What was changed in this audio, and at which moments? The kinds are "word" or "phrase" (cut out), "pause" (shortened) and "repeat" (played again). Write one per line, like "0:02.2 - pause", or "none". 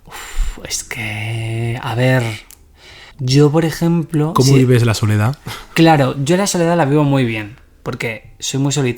0:03.1 - pause